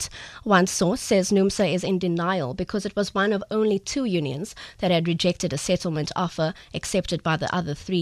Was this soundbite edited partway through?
no; 0 cuts

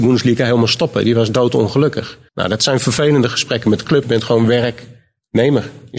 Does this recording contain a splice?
yes; 2 cuts; at 2.3 s, 4.0 s

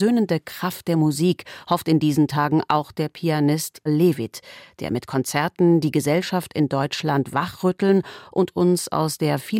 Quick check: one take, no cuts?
no; 1 cut; at 3.9 s

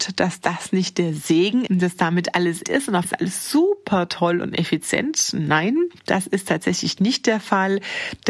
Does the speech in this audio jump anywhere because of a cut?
yes; 4 cuts; at 1.7 s, 2.6 s, 3.0 s, 6.0 s

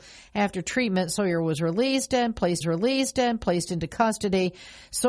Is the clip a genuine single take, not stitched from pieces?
no; 1 cut; at 2.6 s

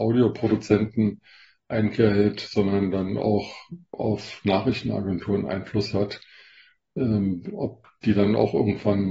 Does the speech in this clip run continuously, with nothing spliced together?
yes; 0 cuts

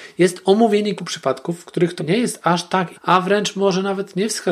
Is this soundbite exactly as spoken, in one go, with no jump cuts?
no; 3 cuts; at 1.0 s, 2.0 s, 2.9 s

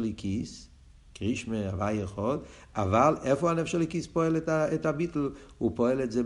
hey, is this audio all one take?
yes; 0 cuts

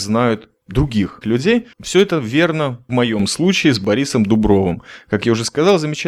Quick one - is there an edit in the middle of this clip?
yes; 3 cuts; at 1.2 s, 1.7 s, 2.9 s

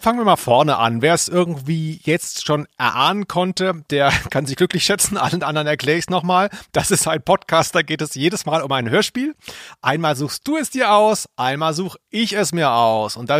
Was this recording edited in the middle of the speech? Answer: no; 0 cuts

